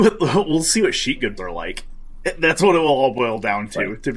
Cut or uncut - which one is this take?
cut